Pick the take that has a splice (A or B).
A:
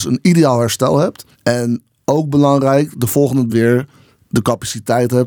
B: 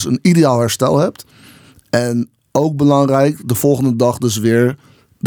A